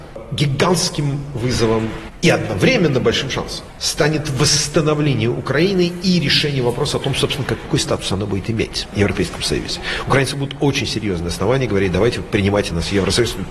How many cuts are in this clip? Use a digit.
0